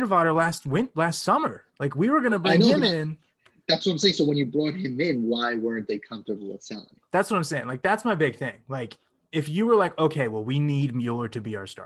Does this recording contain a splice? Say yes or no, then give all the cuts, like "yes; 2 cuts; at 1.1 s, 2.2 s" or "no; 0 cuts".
no; 0 cuts